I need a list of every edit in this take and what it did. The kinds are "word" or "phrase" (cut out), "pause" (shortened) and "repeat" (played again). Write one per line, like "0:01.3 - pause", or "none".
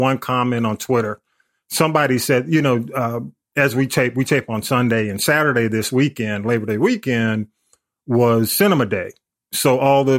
none

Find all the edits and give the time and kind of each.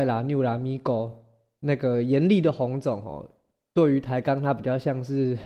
none

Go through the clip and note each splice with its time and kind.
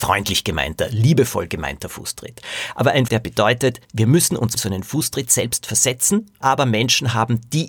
0:03.1 - word
0:03.8 - pause
0:04.6 - word
0:06.4 - word

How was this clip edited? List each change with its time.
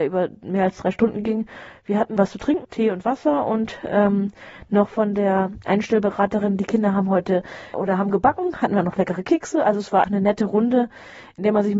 0:02.2 - word
0:02.6 - word
0:07.7 - word
0:10.0 - word

